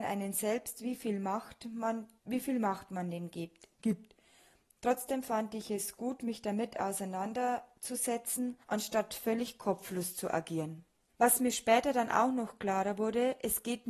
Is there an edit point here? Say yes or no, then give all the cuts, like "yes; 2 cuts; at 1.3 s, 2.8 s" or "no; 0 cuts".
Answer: yes; 4 cuts; at 2.2 s, 3.7 s, 8.6 s, 11.1 s